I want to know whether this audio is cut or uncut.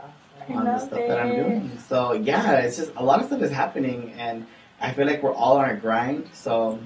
uncut